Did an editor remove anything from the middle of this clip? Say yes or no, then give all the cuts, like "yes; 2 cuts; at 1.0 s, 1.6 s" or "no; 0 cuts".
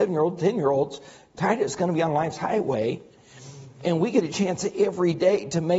no; 0 cuts